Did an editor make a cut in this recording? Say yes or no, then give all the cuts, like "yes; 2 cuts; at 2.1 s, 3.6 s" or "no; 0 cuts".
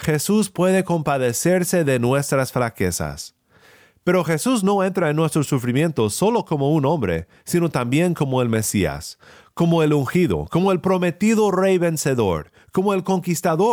no; 0 cuts